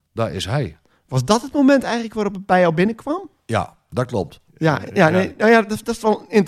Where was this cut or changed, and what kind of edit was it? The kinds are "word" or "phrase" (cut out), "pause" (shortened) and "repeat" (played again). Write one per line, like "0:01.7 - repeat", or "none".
0:04.5 - pause